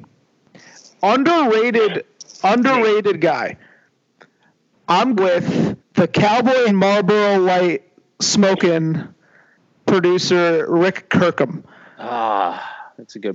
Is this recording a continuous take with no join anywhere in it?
no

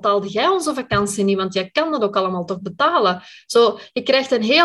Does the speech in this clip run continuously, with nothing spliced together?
yes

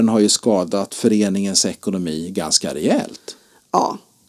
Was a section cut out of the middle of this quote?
no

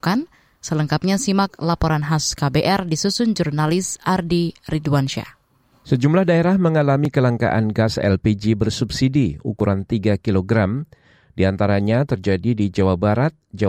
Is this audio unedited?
yes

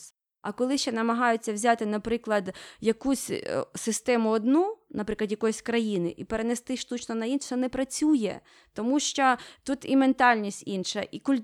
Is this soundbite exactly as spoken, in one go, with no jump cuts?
yes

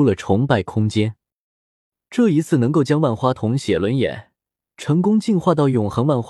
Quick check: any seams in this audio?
no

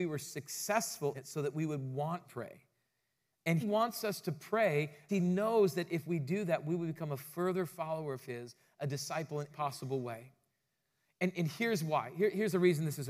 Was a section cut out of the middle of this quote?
yes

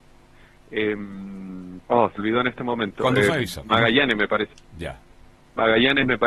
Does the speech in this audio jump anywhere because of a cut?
yes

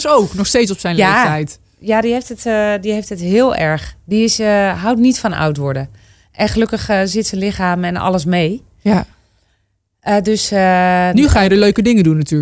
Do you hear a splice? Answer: no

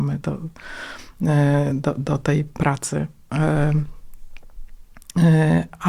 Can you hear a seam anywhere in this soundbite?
no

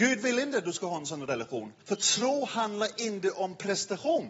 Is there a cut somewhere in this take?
yes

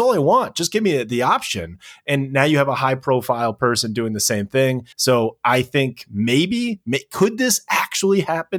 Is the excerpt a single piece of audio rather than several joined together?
no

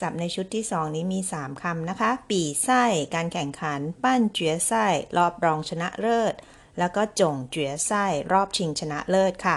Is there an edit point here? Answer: no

